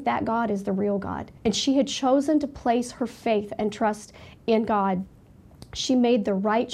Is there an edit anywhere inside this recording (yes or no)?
yes